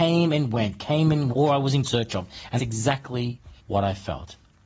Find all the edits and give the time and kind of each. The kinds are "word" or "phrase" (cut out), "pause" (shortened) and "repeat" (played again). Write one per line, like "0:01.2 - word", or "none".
0:01.3 - word
0:01.8 - word
0:02.6 - word
0:03.6 - pause